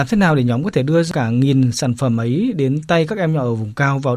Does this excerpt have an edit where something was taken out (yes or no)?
no